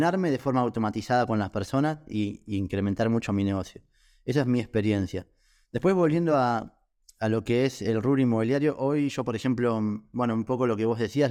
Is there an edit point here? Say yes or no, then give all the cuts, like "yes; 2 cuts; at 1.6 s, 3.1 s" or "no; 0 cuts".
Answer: no; 0 cuts